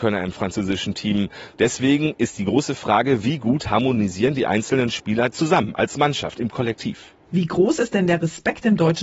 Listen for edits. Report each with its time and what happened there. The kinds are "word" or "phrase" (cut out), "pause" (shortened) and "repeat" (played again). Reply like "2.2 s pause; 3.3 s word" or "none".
none